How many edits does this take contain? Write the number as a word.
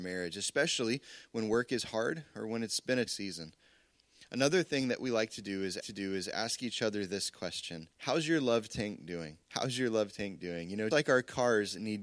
five